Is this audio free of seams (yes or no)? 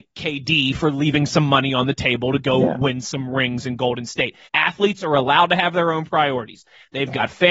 no